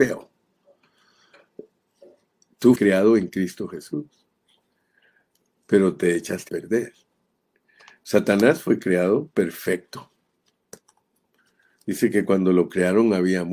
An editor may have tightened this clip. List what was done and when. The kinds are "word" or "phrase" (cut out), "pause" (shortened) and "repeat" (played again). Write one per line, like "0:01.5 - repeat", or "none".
0:02.8 - word
0:06.5 - word